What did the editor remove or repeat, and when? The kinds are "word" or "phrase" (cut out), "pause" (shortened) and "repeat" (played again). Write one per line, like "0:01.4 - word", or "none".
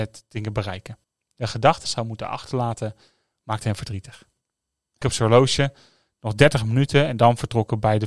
0:01.0 - pause
0:01.8 - phrase
0:05.0 - word